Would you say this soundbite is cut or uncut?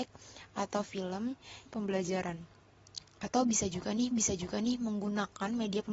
cut